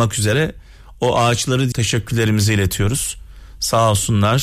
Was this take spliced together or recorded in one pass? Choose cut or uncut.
cut